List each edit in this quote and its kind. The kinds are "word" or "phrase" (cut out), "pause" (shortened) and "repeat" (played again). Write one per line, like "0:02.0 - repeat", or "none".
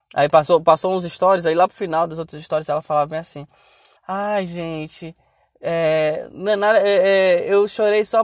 0:04.0 - pause